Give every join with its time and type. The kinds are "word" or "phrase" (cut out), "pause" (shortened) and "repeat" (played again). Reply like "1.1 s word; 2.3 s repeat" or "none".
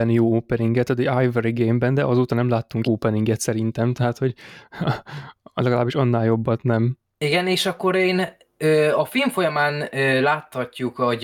2.9 s word